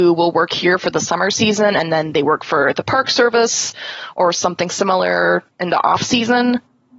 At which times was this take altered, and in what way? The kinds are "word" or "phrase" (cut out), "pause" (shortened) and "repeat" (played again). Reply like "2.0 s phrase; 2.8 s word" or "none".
none